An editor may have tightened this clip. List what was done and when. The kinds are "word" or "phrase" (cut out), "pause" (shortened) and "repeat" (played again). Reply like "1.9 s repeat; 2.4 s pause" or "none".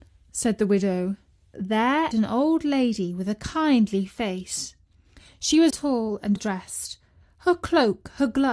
2.1 s word; 5.7 s word; 6.4 s word